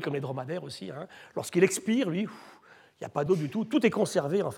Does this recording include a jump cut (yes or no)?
no